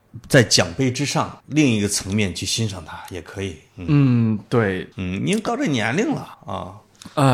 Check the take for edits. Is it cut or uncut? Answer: cut